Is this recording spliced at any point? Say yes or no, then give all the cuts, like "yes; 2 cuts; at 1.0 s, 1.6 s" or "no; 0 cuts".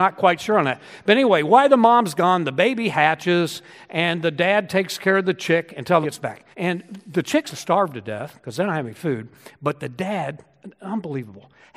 yes; 3 cuts; at 6.0 s, 6.5 s, 7.5 s